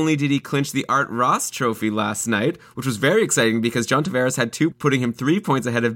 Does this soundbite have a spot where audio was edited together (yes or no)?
yes